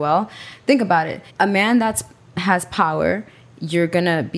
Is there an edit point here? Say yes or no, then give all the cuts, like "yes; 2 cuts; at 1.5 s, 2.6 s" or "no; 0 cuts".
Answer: yes; 1 cut; at 1.3 s